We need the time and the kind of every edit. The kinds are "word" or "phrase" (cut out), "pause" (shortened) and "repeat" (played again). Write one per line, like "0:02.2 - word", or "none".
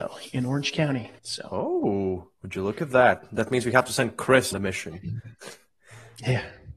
0:01.2 - pause
0:02.3 - pause
0:04.5 - word